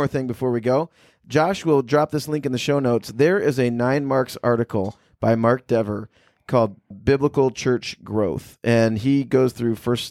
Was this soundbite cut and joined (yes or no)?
yes